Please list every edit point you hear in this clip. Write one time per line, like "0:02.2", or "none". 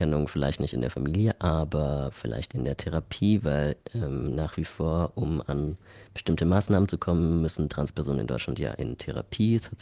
none

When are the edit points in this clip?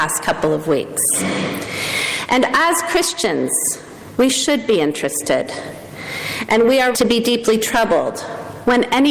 0:06.9

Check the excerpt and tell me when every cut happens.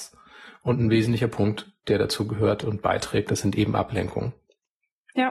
none

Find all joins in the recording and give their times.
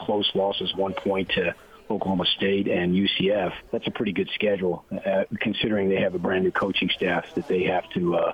0:03.7

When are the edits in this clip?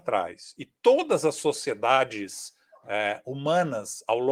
none

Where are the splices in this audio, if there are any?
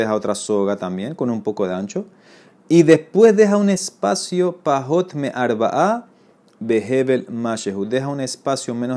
none

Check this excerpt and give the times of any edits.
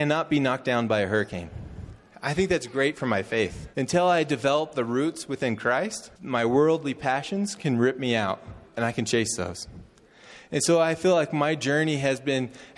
0:03.7
0:06.2
0:08.7

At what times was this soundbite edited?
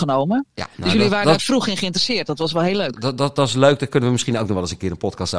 0:01.4

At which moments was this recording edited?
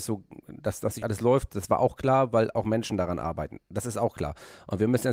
0:01.0

